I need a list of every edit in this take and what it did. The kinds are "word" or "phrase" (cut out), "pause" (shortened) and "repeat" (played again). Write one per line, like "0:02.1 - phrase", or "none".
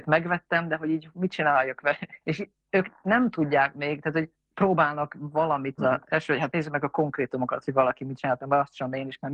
0:02.2 - pause
0:04.3 - pause
0:05.8 - phrase
0:06.5 - word

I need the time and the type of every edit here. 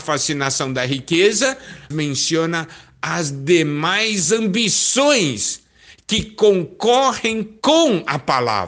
0:01.9 - word

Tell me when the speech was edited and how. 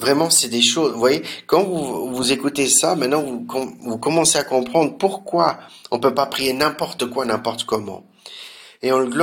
none

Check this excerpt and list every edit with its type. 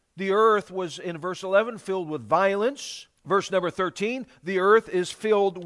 0:03.2 - pause

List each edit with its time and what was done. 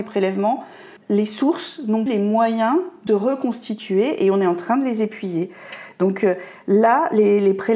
0:01.0 - pause
0:02.1 - word
0:03.1 - word

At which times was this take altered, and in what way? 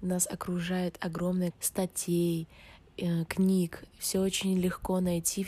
0:01.5 - phrase

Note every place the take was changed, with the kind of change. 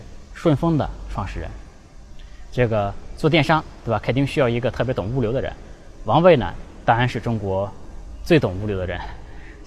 none

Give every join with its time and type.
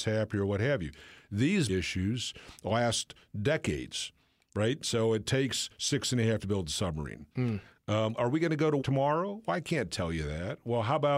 0:01.7 - word
0:06.4 - word
0:08.1 - word
0:08.8 - word

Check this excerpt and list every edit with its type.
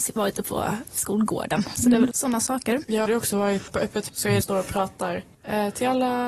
0:02.1 - word
0:03.1 - phrase
0:03.7 - word
0:04.1 - word
0:04.4 - phrase

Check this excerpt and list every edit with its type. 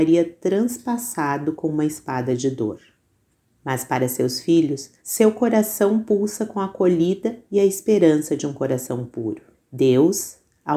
0:03.3 - pause
0:05.0 - pause
0:09.5 - pause

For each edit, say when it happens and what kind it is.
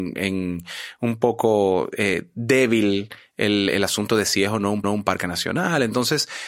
0:04.8 - repeat

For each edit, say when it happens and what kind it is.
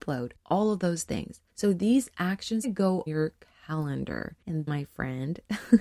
0:01.5 - pause
0:02.6 - phrase
0:03.1 - word
0:04.7 - word

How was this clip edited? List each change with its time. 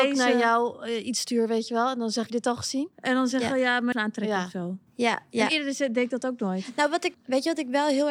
0:02.3 - phrase
0:02.9 - pause
0:03.9 - word
0:04.9 - pause
0:07.1 - word

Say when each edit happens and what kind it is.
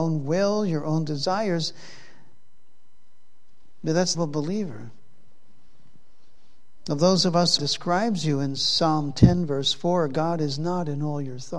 0:04.1 - phrase
0:07.6 - phrase

